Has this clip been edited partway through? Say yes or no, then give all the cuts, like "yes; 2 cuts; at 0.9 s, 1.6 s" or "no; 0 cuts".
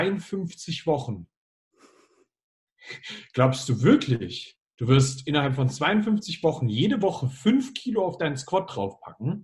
no; 0 cuts